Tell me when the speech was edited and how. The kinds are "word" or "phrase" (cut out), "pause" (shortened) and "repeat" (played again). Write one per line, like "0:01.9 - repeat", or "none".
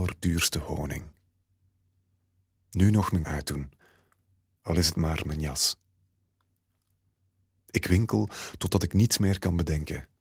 0:03.2 - word